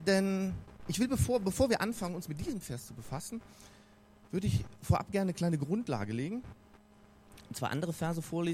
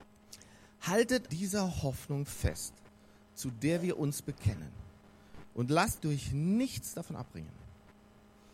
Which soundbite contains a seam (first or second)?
second